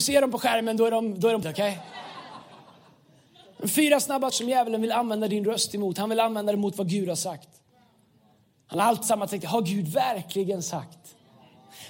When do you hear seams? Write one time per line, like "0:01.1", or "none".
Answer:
0:01.4
0:04.3
0:09.0